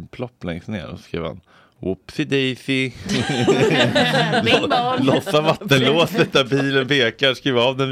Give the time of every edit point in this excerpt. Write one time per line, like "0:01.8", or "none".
none